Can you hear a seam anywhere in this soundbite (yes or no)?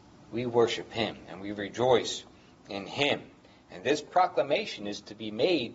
no